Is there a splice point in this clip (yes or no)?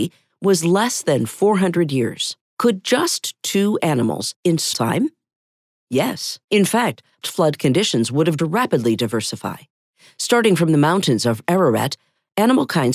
yes